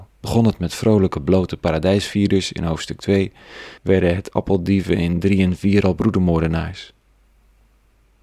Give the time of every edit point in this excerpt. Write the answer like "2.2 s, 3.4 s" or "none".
3.8 s